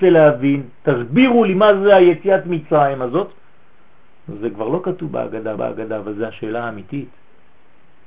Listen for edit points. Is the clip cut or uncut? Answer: cut